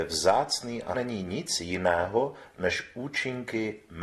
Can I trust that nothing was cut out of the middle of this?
no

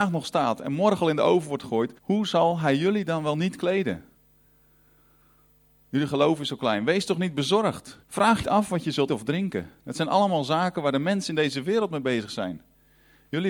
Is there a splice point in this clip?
yes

